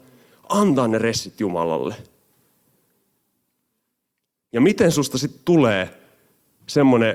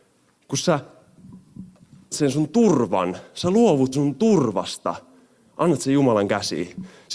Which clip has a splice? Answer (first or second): second